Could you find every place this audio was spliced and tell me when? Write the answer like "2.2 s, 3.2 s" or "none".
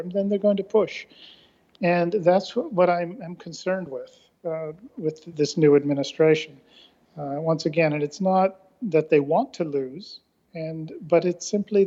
none